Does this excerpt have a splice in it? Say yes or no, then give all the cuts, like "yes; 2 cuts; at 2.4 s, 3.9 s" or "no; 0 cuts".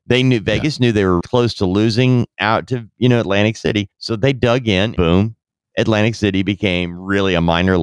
yes; 3 cuts; at 1.2 s, 3.9 s, 5.0 s